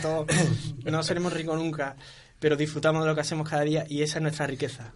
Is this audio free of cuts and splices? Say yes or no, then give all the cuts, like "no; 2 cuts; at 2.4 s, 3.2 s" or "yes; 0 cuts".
yes; 0 cuts